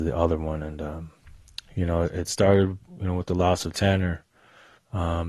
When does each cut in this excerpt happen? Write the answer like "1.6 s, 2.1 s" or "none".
none